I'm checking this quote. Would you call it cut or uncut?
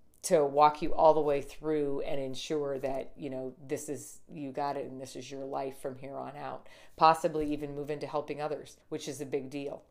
cut